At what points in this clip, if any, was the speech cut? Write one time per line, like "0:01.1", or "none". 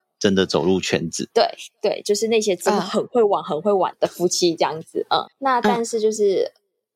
0:05.3